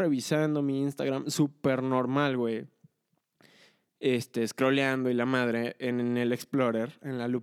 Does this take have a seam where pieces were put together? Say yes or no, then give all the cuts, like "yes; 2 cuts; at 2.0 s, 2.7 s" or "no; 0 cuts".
no; 0 cuts